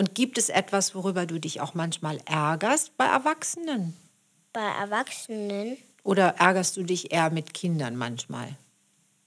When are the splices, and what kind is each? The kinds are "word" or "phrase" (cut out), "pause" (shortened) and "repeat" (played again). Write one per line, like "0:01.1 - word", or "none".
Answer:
none

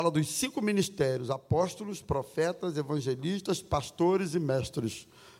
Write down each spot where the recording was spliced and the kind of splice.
none

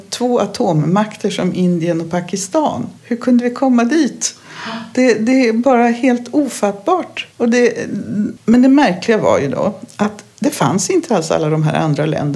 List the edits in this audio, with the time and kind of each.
0:03.0 - pause
0:07.3 - pause
0:08.4 - word

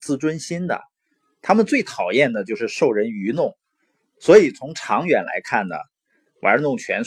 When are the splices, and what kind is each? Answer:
none

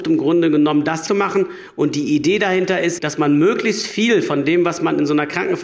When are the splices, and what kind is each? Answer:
0:01.1 - phrase
0:03.0 - word

